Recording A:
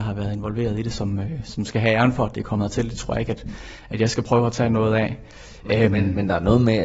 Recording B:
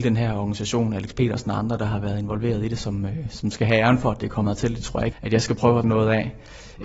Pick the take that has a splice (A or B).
B